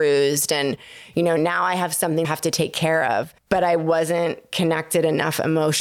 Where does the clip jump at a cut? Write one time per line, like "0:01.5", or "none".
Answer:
0:02.2
0:03.4